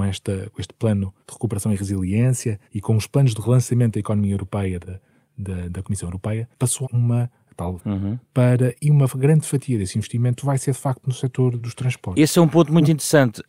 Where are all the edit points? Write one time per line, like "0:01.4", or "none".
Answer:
0:01.2
0:02.6
0:03.4
0:04.8
0:06.5
0:06.8
0:07.8
0:08.7
0:11.6